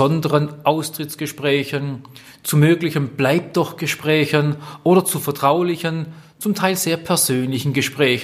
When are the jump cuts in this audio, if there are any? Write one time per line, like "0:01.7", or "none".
none